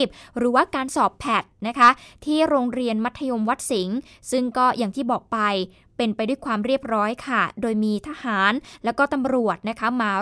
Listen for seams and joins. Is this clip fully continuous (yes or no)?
yes